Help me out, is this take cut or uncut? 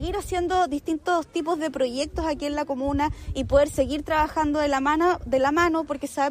uncut